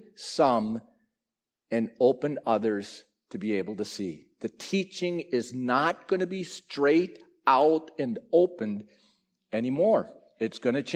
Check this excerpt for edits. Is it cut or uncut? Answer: uncut